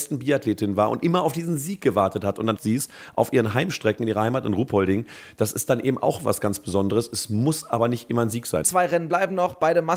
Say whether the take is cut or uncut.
cut